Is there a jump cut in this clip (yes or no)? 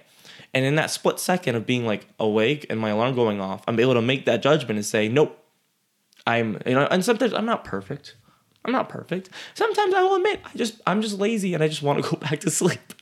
no